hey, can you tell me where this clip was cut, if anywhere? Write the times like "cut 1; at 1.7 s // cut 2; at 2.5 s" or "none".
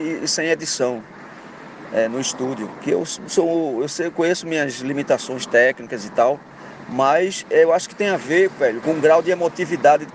cut 1; at 8.8 s